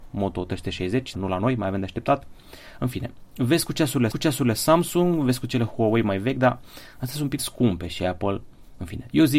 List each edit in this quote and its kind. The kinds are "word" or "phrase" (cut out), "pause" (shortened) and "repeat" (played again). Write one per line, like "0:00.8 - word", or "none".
0:01.1 - word
0:04.1 - repeat
0:07.4 - word
0:07.9 - phrase